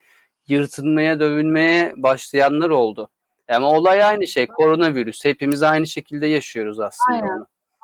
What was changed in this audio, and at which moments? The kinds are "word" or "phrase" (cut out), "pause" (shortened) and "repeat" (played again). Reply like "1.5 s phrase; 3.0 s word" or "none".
none